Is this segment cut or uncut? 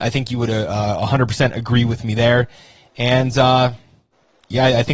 uncut